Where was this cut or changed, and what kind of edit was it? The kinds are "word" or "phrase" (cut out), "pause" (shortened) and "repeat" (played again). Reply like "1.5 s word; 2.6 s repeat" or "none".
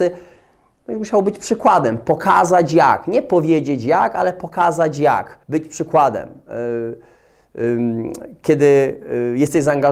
5.4 s pause

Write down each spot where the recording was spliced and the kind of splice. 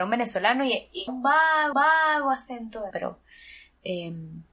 1.1 s word; 1.7 s repeat; 2.9 s word

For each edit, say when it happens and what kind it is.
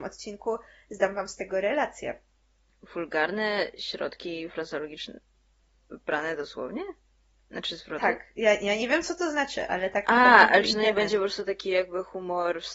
none

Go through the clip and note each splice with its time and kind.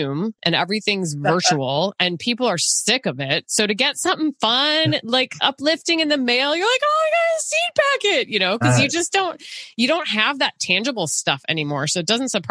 none

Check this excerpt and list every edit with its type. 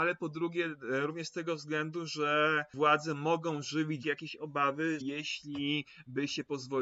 4.0 s word; 5.0 s word

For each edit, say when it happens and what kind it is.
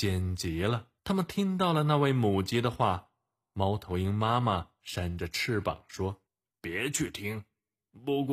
1.0 s pause; 6.3 s pause

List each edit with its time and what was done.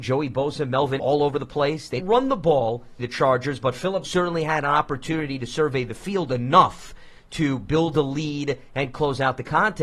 1.0 s word; 2.0 s word; 3.0 s word; 4.0 s word

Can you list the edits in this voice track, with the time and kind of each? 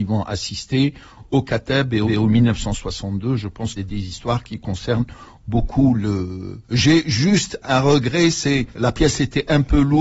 2.1 s repeat; 3.8 s phrase; 6.6 s pause; 7.6 s word; 8.7 s pause

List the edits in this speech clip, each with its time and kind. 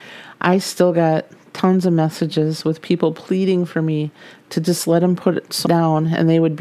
5.6 s word

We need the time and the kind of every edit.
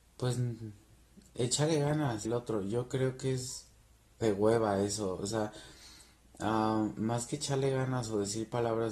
2.3 s phrase

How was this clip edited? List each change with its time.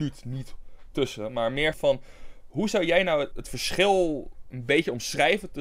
1.7 s word; 3.3 s word

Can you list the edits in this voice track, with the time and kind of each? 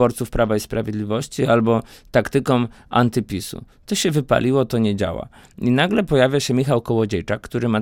none

